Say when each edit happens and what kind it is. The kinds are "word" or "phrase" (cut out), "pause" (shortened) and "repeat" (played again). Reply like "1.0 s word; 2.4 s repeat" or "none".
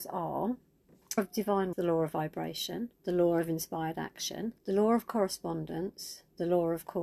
1.2 s phrase; 1.7 s word; 2.9 s pause; 4.6 s pause